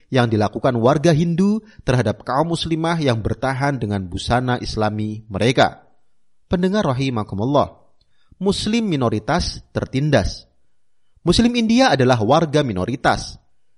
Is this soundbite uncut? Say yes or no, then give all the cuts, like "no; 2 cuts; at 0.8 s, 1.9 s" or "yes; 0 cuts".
yes; 0 cuts